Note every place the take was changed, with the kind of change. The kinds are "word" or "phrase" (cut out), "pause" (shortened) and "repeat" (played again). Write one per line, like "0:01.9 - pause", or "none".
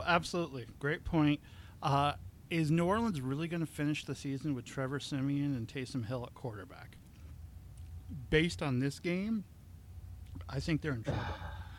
none